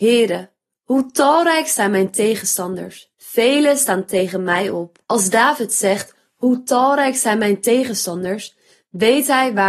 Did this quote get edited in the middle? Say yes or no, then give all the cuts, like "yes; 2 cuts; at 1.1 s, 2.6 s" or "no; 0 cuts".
yes; 2 cuts; at 3.1 s, 5.0 s